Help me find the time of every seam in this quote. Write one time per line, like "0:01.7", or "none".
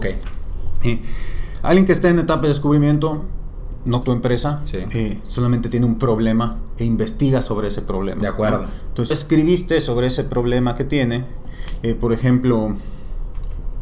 0:04.0
0:09.1